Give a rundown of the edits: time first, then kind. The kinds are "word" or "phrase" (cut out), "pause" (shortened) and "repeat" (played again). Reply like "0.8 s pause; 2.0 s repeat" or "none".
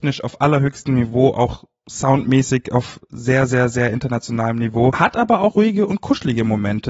5.5 s word